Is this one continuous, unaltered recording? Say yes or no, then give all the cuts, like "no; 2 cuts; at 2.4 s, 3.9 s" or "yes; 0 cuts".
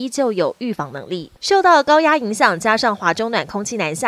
no; 1 cut; at 1.4 s